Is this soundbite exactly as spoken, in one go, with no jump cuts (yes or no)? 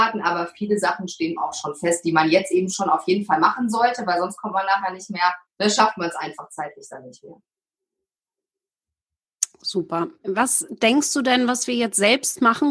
no